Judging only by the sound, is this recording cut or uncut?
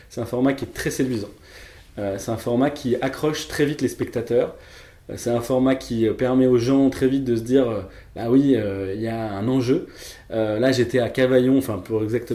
uncut